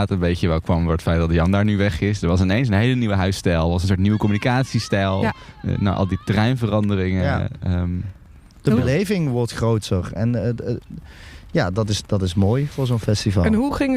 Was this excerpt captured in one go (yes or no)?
yes